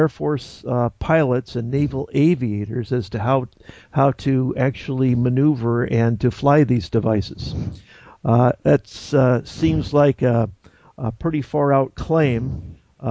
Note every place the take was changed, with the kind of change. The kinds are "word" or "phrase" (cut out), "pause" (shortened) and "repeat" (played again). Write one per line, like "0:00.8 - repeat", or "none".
none